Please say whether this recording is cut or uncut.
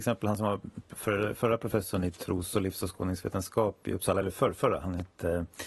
uncut